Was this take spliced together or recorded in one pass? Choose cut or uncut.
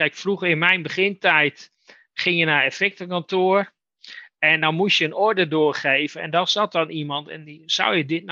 uncut